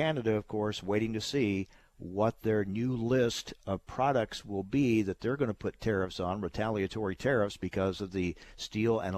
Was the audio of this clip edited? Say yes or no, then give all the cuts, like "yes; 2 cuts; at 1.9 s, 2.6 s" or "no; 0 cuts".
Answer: no; 0 cuts